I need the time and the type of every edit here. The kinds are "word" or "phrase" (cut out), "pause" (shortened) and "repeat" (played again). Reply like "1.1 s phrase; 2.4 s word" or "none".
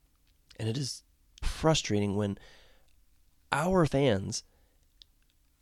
1.4 s word; 3.9 s phrase